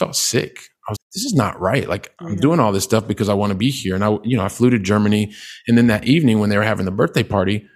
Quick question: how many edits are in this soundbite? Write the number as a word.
one